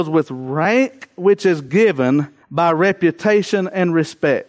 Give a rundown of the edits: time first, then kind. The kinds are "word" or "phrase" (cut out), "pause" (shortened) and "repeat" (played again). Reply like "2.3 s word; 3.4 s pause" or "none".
2.4 s pause